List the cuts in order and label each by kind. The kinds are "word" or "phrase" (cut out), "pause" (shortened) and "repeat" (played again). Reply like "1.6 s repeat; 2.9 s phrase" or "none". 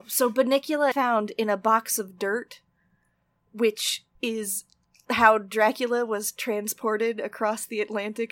0.9 s word; 4.2 s pause